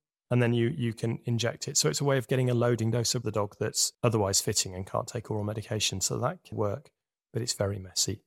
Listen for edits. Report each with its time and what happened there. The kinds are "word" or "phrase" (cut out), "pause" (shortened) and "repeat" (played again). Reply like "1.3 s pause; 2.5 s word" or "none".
3.2 s phrase; 3.9 s pause; 6.5 s word